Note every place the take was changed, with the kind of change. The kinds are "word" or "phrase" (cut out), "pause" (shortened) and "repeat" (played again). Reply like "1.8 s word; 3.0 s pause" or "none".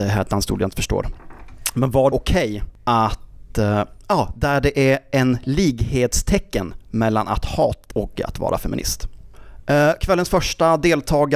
2.1 s word; 7.9 s word